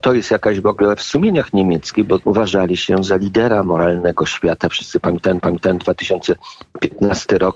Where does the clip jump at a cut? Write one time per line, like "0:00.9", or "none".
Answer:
0:01.0
0:02.2
0:05.4

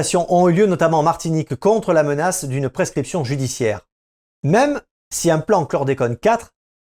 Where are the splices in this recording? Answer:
none

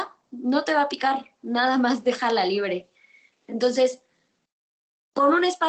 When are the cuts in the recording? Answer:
none

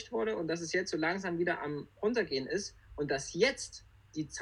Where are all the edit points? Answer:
none

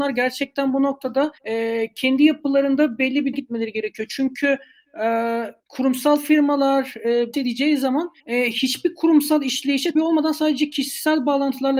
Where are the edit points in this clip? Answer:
0:01.4
0:03.3
0:05.6
0:07.3
0:08.2
0:09.9

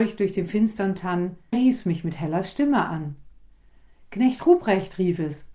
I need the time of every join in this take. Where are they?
0:01.5

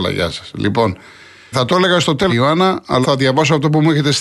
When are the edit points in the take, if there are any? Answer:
0:01.5
0:02.3
0:03.0

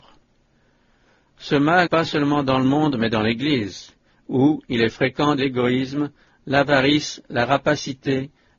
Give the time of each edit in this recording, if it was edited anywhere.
0:01.9
0:05.4

